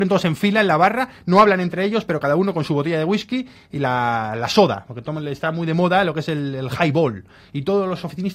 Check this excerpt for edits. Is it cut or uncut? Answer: uncut